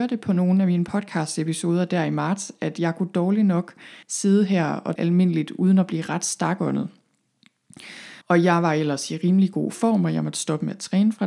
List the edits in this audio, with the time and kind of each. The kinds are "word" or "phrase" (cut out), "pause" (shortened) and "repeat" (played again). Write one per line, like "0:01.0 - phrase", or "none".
0:04.0 - pause
0:05.0 - word
0:08.2 - pause